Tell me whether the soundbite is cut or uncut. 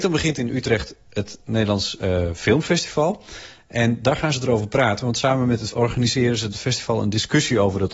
cut